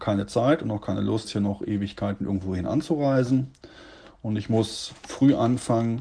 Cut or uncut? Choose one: cut